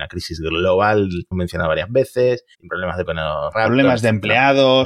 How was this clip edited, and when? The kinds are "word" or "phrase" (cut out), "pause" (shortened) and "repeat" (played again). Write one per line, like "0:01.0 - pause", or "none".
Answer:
0:01.3 - phrase
0:02.5 - pause
0:03.1 - word
0:03.5 - word